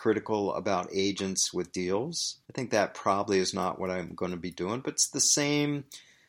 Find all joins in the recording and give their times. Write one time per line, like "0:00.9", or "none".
0:02.4